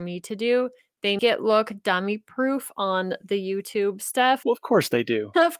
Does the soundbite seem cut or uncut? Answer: cut